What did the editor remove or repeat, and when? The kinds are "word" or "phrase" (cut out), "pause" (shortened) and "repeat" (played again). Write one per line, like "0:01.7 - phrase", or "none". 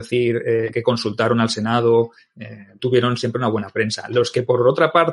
0:02.8 - word

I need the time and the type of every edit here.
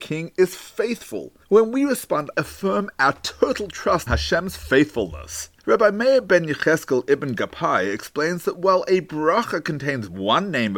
0:01.4 - pause
0:02.3 - phrase
0:04.1 - word
0:05.6 - pause

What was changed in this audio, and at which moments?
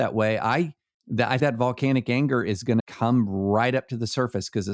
0:00.9 - pause
0:01.4 - word
0:02.8 - word

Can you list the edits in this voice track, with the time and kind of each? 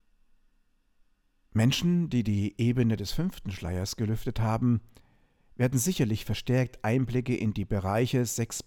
none

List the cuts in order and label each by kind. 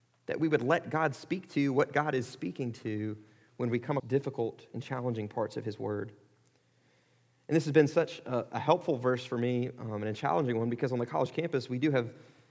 0:04.0 - word

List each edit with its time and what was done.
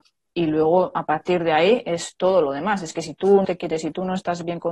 0:03.4 - word

